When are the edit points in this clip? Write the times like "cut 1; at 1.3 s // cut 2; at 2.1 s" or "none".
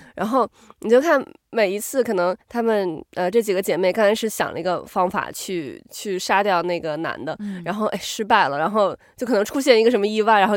cut 1; at 2.4 s